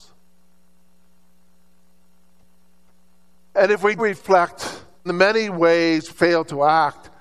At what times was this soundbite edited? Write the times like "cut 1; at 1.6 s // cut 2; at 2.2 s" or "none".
cut 1; at 4.0 s // cut 2; at 5.1 s // cut 3; at 6.1 s